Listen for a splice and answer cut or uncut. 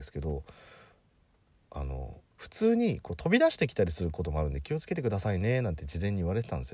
cut